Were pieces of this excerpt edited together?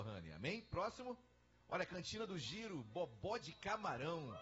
yes; 1 cut; at 1.5 s

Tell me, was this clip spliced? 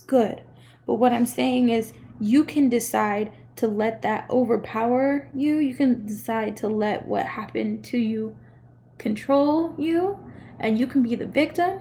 no; 0 cuts

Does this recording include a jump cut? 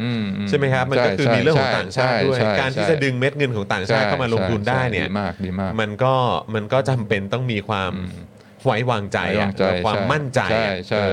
no; 0 cuts

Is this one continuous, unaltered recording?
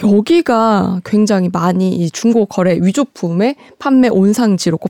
yes; 0 cuts

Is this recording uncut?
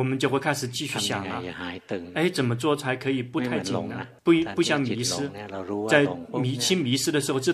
no; 1 cut; at 4.2 s

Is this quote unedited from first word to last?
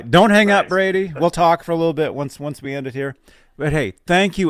yes; 0 cuts

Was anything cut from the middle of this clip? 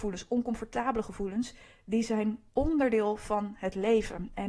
no; 0 cuts

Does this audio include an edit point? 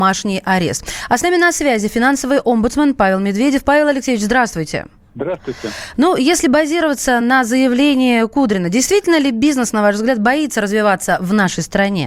no; 0 cuts

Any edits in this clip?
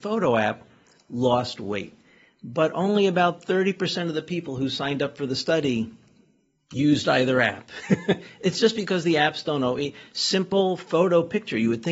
no; 0 cuts

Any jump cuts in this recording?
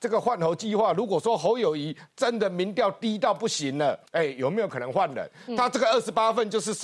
yes; 1 cut; at 4.1 s

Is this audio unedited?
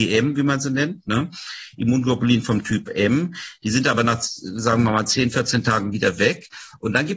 yes; 0 cuts

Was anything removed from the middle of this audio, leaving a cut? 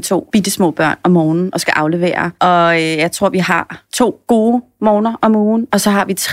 no; 0 cuts

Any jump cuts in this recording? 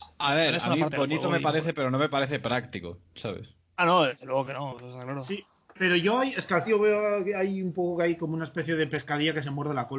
yes; 1 cut; at 6.7 s

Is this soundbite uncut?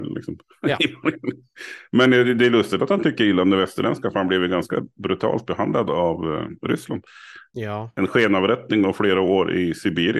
yes; 0 cuts

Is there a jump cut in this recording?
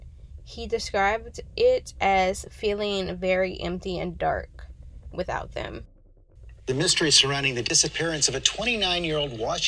no; 0 cuts

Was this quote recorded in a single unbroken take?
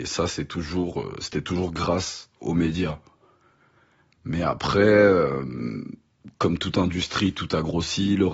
yes; 0 cuts

